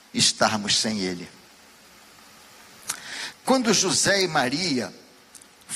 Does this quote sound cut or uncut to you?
uncut